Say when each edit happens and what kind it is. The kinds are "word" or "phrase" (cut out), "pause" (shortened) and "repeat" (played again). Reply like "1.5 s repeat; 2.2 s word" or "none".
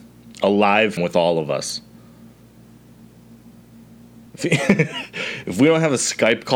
1.0 s word; 4.3 s pause